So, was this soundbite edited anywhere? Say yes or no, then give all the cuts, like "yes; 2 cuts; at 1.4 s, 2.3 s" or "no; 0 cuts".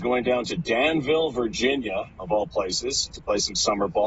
yes; 1 cut; at 3.1 s